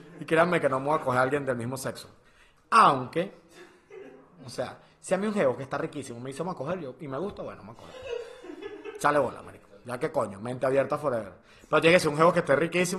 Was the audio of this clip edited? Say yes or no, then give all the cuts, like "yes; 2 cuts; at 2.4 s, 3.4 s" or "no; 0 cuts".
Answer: no; 0 cuts